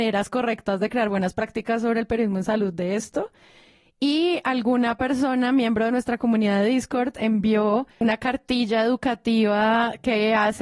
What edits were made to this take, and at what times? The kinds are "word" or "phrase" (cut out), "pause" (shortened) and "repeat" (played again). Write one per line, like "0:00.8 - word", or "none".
none